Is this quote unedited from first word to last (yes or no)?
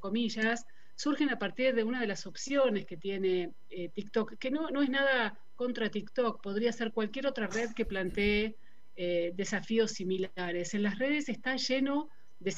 yes